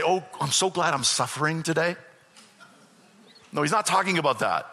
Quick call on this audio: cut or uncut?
uncut